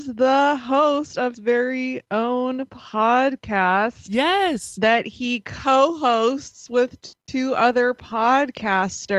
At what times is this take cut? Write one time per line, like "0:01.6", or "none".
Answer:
0:01.3